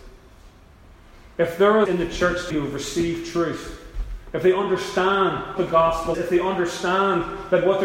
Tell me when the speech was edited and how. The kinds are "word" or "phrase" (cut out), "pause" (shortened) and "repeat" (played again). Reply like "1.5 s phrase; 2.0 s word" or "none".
1.8 s word; 2.5 s word; 5.6 s word; 6.1 s word